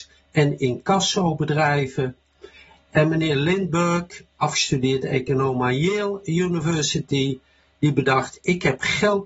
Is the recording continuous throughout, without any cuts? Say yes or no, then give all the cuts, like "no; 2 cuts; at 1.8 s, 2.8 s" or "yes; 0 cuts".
yes; 0 cuts